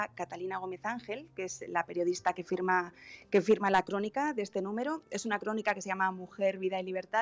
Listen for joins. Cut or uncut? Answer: uncut